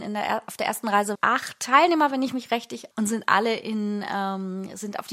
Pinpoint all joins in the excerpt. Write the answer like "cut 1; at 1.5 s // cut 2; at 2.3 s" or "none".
cut 1; at 1.1 s // cut 2; at 2.9 s

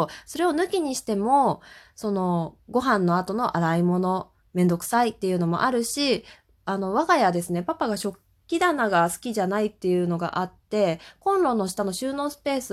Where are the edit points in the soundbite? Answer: cut 1; at 4.4 s

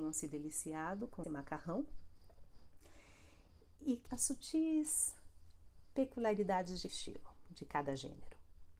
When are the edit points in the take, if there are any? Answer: cut 1; at 1.2 s // cut 2; at 4.1 s // cut 3; at 6.9 s

